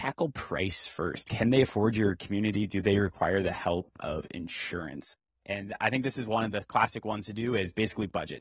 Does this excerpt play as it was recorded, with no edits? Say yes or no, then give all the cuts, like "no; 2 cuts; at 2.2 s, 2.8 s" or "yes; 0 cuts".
yes; 0 cuts